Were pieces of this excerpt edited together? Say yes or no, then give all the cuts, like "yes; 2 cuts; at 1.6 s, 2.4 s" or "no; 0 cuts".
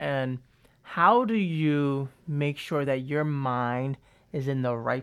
no; 0 cuts